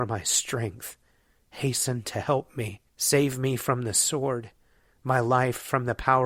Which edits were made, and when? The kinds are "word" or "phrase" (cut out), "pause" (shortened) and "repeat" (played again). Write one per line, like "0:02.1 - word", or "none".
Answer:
0:02.9 - pause